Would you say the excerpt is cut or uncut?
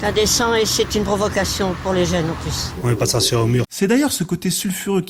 uncut